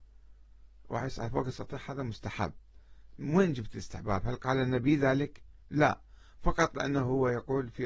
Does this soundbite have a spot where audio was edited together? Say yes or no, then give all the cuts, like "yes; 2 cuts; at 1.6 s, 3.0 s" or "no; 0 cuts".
no; 0 cuts